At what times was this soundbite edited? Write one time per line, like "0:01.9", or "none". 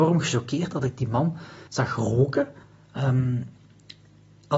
0:01.7
0:02.6